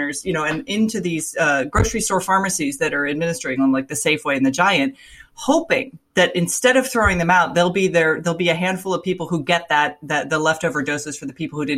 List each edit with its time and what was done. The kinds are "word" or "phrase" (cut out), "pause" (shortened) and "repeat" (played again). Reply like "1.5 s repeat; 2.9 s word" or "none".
none